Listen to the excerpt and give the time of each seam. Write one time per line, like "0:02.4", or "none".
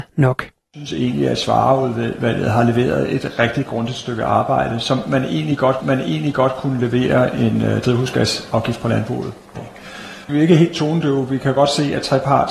0:05.8
0:09.6
0:10.2